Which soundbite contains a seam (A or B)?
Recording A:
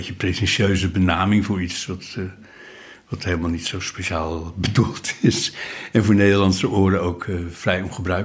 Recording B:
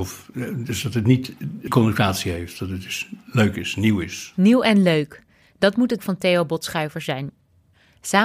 B